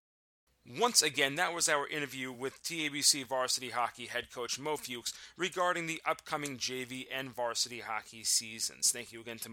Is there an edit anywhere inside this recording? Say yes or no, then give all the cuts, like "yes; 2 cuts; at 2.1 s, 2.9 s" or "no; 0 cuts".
no; 0 cuts